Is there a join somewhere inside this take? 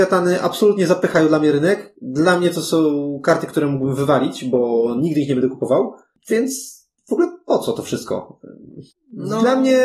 no; 0 cuts

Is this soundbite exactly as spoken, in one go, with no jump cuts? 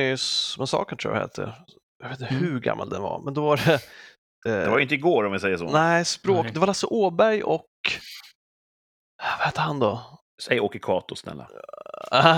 no; 1 cut; at 10.3 s

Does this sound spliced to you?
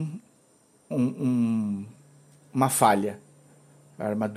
no; 0 cuts

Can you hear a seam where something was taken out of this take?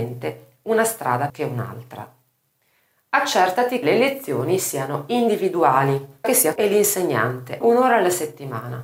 yes; 5 cuts; at 1.3 s, 3.8 s, 6.2 s, 6.6 s, 7.6 s

